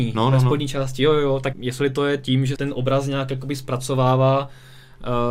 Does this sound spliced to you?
yes; 2 cuts; at 1.5 s, 2.6 s

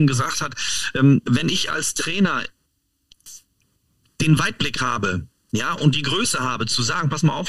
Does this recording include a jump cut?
no; 0 cuts

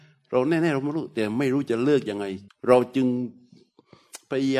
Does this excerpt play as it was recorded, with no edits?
no; 1 cut; at 2.5 s

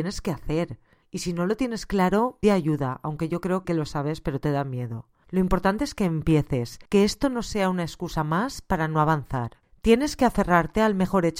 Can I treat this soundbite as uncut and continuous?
no; 3 cuts; at 2.4 s, 3.6 s, 6.9 s

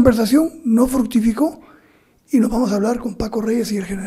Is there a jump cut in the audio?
no; 0 cuts

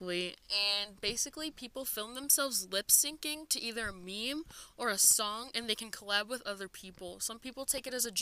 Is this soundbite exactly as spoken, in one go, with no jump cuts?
yes; 0 cuts

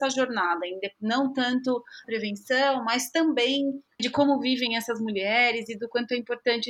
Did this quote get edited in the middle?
yes; 2 cuts; at 2.0 s, 4.0 s

